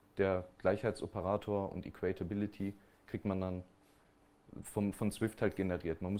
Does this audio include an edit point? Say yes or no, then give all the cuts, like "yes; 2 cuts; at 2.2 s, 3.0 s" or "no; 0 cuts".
no; 0 cuts